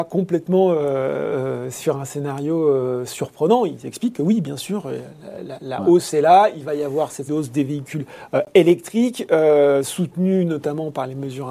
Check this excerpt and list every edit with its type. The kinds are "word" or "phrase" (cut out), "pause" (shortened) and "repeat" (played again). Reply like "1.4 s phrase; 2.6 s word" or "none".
5.6 s word; 7.3 s word